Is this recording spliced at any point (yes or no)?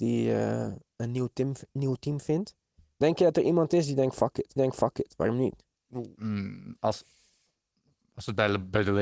yes